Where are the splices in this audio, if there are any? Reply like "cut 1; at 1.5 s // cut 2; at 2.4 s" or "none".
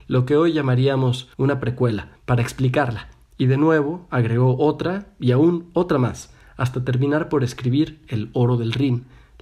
cut 1; at 1.3 s // cut 2; at 2.2 s